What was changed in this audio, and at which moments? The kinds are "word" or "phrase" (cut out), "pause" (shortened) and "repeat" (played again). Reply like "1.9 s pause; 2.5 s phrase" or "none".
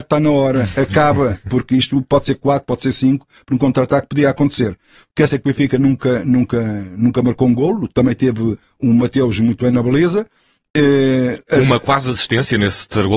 5.3 s word